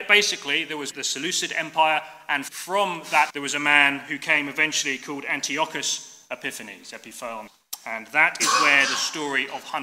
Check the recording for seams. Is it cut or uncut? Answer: cut